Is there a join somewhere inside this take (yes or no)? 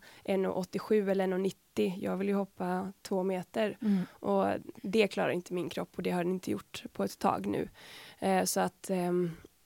yes